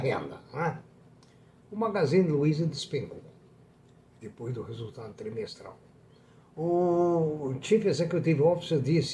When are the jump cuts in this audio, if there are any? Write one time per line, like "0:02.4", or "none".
none